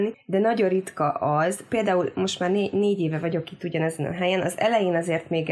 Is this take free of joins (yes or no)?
yes